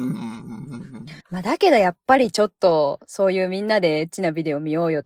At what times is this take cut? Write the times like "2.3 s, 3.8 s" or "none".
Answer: 1.2 s